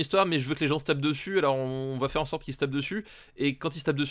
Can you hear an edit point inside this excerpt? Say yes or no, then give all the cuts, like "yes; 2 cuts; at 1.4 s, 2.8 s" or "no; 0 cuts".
no; 0 cuts